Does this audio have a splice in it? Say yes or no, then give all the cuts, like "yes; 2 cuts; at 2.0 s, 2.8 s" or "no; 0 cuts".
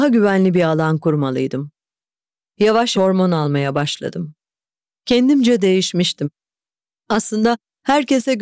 yes; 1 cut; at 2.9 s